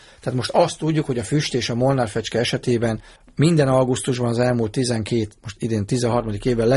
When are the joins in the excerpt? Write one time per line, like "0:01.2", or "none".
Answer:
0:03.2
0:05.4